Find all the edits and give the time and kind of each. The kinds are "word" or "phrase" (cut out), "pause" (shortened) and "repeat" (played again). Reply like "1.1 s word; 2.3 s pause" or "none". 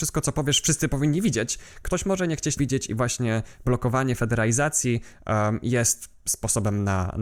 2.6 s word